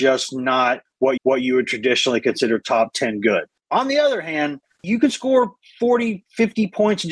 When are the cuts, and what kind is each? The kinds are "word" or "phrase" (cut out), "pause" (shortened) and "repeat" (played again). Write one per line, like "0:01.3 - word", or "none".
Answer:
0:01.2 - repeat

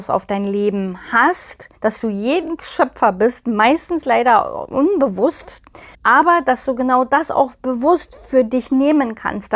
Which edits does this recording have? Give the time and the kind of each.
0:01.7 - pause
0:02.6 - word
0:05.9 - pause

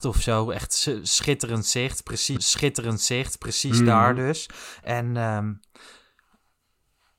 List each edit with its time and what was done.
0:02.4 - repeat

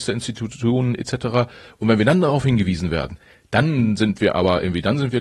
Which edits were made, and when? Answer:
none

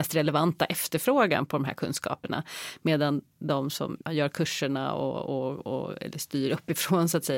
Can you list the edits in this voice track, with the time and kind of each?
0:04.0 - pause

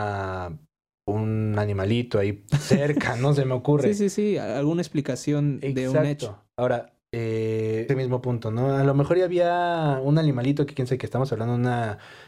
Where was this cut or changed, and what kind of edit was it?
0:07.9 - word

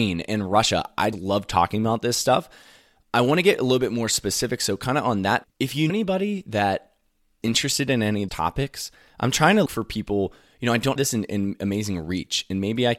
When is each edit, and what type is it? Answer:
0:01.1 - word
0:05.4 - word
0:05.9 - word
0:07.4 - word
0:08.3 - word
0:09.7 - word
0:11.0 - word

